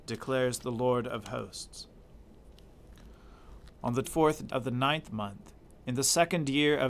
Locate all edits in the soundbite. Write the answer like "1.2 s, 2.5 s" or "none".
4.0 s, 4.5 s